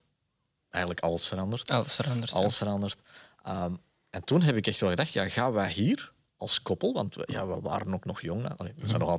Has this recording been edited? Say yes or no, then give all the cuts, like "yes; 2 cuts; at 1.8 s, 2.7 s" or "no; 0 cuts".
no; 0 cuts